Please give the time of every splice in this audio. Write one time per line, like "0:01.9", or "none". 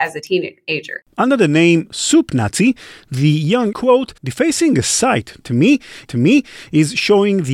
0:01.1
0:03.7
0:04.2
0:06.0